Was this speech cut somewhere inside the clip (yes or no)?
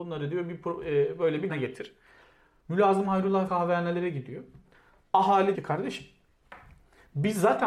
yes